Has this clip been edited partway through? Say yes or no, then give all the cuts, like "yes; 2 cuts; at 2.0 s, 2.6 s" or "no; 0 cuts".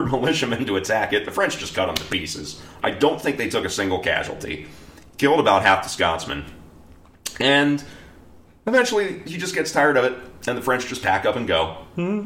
no; 0 cuts